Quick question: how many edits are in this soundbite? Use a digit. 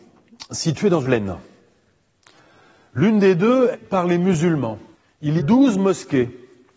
4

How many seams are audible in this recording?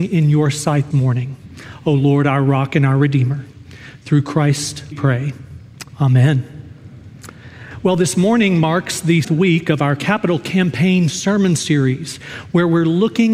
3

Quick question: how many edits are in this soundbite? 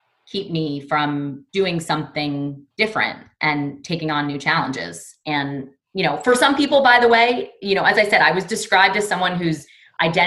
2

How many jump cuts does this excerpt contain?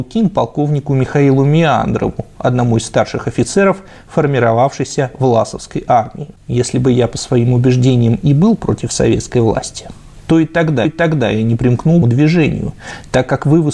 2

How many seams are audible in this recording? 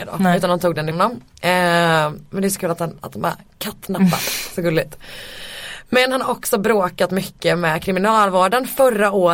1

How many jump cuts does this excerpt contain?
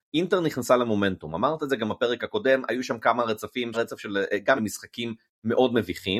2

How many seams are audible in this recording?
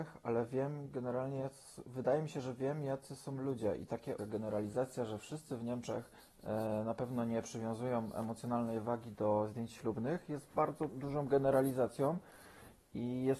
3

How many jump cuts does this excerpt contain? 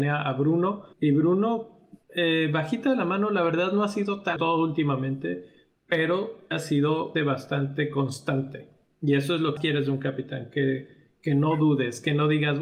6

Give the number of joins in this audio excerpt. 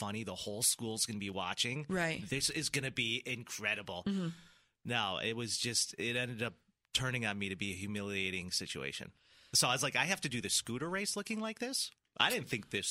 0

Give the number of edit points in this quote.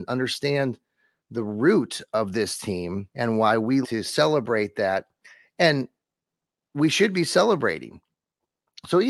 2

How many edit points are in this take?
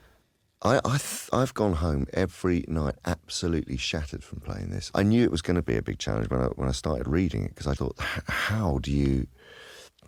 1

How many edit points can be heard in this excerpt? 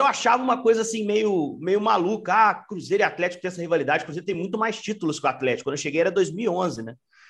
0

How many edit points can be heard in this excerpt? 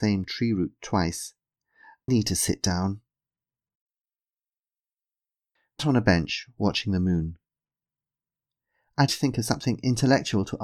3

